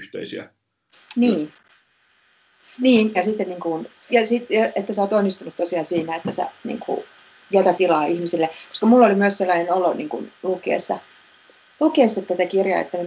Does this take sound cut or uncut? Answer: cut